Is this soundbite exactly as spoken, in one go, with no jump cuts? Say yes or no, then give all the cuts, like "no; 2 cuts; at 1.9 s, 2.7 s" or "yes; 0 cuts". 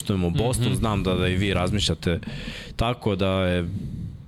yes; 0 cuts